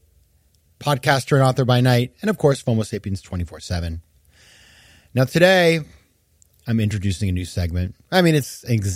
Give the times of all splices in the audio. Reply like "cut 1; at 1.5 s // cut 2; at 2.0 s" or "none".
none